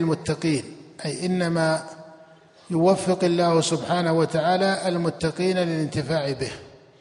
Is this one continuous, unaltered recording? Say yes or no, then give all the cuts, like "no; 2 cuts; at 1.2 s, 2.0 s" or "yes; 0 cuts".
yes; 0 cuts